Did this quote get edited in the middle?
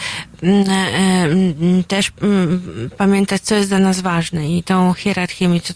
no; 0 cuts

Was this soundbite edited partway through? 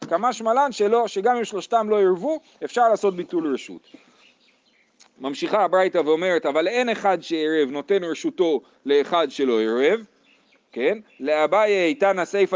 no; 0 cuts

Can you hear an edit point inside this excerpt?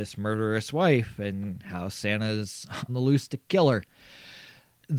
yes; 1 cut; at 2.9 s

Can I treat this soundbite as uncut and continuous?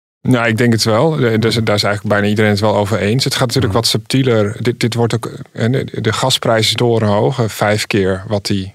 no; 1 cut; at 6.7 s

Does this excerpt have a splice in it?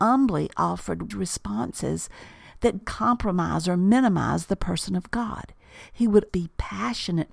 yes; 3 cuts; at 1.1 s, 2.8 s, 6.3 s

